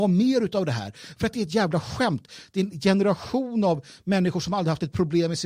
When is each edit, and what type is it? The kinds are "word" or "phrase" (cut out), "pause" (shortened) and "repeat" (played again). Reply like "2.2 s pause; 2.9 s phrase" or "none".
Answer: none